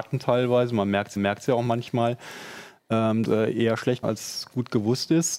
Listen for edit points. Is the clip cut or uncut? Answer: cut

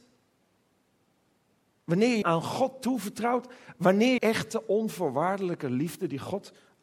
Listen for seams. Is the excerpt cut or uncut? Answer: cut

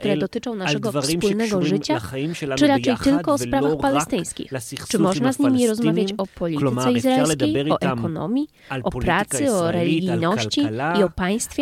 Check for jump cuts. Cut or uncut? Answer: uncut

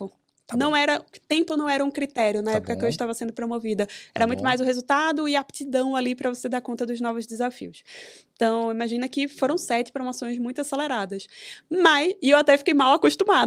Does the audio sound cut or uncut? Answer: uncut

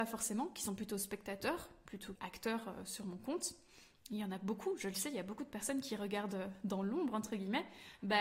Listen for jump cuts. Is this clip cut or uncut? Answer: cut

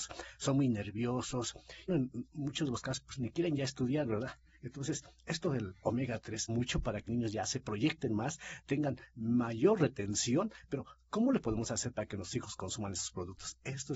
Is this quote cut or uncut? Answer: cut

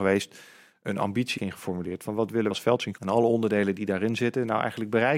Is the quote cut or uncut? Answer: cut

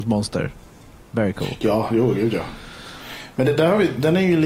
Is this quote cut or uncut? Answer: uncut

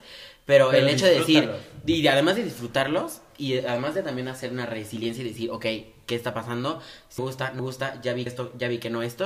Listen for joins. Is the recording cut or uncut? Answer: cut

